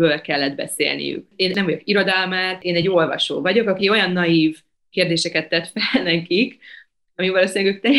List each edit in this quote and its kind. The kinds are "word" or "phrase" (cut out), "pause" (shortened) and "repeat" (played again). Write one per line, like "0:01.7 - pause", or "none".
none